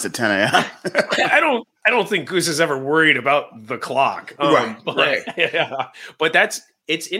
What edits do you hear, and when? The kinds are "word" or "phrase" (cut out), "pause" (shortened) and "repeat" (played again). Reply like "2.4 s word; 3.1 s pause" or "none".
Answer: none

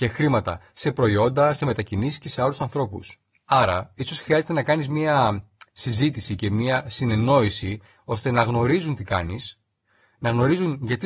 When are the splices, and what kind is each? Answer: none

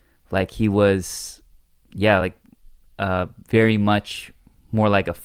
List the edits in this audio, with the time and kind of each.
none

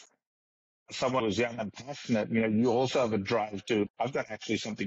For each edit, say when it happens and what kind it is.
1.2 s word; 3.9 s word

